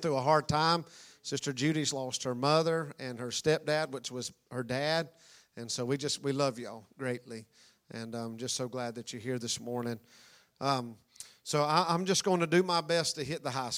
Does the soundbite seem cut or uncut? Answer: uncut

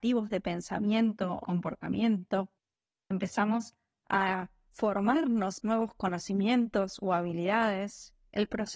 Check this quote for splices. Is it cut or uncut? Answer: cut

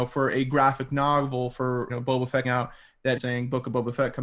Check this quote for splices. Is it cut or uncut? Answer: cut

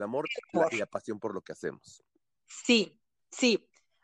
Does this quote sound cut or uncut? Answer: uncut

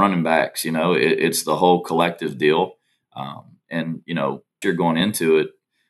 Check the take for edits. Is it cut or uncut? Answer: cut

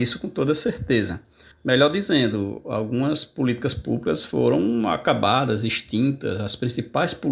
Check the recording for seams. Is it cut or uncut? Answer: cut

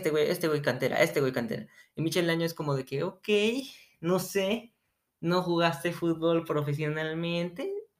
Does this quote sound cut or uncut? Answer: uncut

